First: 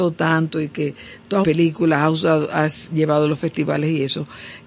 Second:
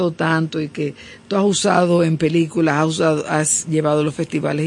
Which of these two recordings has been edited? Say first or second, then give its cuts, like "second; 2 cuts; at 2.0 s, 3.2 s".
first; 1 cut; at 1.4 s